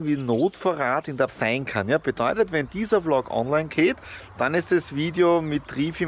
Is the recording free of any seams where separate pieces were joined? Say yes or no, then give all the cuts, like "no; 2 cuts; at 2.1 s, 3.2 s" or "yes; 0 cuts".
no; 1 cut; at 1.3 s